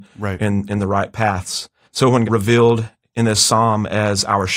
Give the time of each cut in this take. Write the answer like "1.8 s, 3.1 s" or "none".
1.8 s, 2.2 s

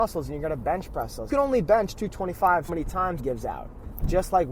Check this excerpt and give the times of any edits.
1.3 s, 2.7 s, 3.2 s

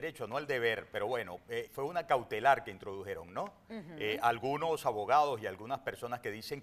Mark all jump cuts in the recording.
1.7 s

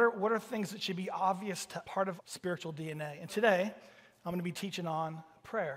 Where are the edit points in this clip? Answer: 1.8 s, 2.2 s, 3.3 s

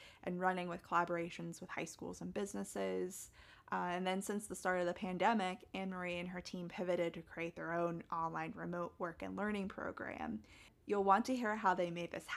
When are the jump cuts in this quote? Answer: none

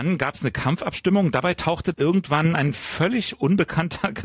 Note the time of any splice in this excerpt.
1.9 s

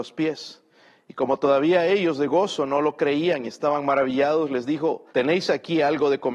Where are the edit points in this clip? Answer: 5.1 s

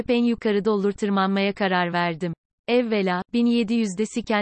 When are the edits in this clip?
2.5 s

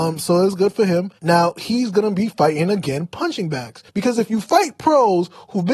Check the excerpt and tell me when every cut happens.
1.2 s, 3.9 s

